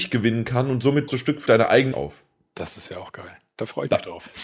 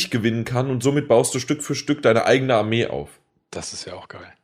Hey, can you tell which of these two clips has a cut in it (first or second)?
first